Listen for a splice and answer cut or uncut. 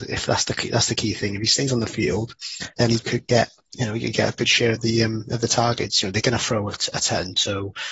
cut